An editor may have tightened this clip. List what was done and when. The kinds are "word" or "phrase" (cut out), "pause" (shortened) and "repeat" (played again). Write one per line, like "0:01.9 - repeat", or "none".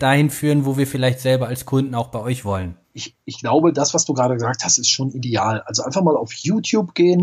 0:02.8 - pause